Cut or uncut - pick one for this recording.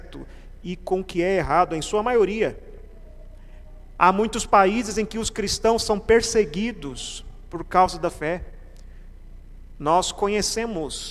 cut